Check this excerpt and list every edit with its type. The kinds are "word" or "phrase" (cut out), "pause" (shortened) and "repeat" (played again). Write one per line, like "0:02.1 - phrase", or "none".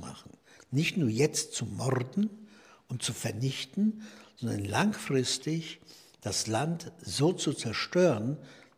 none